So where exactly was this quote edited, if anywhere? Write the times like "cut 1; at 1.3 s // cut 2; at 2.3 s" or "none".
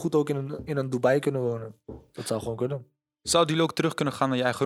none